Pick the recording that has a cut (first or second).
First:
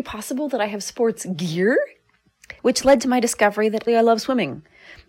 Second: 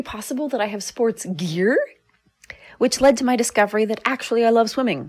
first